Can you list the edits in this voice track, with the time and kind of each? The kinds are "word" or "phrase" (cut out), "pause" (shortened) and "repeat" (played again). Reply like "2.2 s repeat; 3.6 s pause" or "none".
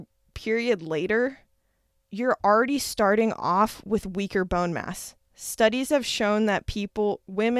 none

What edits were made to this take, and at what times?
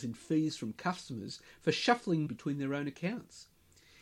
2.3 s word

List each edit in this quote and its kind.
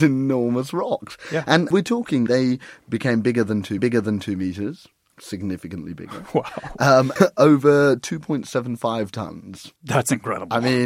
1.7 s word; 2.3 s word; 3.8 s repeat; 7.2 s word; 9.8 s pause

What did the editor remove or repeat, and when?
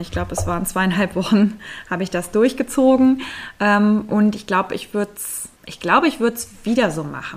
5.6 s pause

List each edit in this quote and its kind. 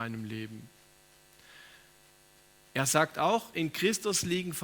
none

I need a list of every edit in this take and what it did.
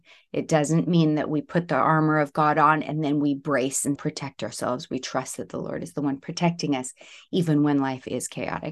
4.0 s word

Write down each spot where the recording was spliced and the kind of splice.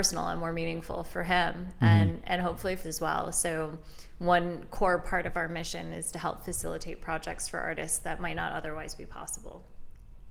2.8 s word

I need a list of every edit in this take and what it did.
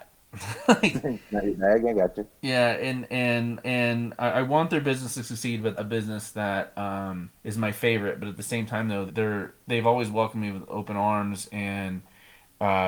2.4 s pause; 3.6 s repeat; 5.8 s phrase; 7.4 s pause; 9.1 s word; 9.6 s pause

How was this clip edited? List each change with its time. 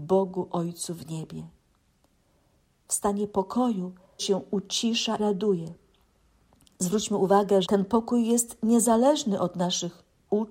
4.2 s word; 5.2 s word; 7.6 s word

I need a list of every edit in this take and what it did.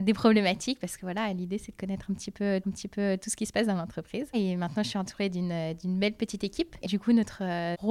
2.6 s repeat; 6.9 s word

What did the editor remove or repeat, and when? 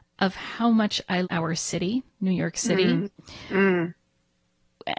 1.2 s word; 2.1 s pause

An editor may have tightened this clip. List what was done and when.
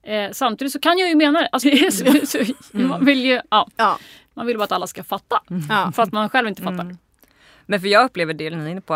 1.6 s word

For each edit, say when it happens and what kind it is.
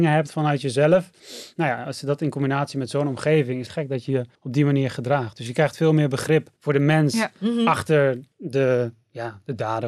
3.7 s phrase; 4.3 s pause; 6.6 s pause; 8.3 s pause

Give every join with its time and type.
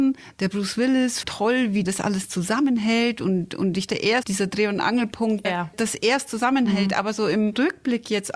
1.2 s word; 1.8 s word; 3.9 s word; 4.2 s word; 5.4 s word

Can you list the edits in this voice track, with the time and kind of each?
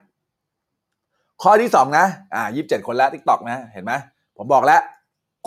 none

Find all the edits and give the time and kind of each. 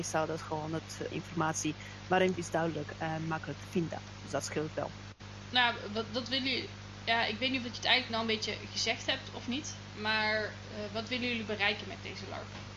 1.1 s phrase; 2.4 s phrase; 8.1 s word

